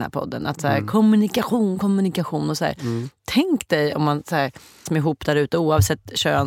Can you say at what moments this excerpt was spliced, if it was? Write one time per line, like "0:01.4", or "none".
0:04.9